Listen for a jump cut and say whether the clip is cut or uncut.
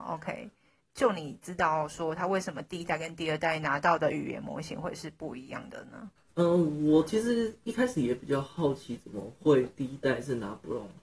cut